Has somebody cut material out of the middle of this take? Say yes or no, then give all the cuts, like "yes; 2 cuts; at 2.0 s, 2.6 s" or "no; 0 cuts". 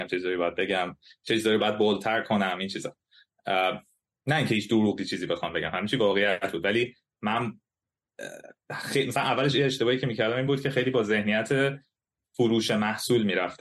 no; 0 cuts